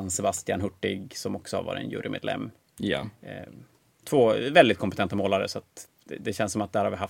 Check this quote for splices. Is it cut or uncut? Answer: uncut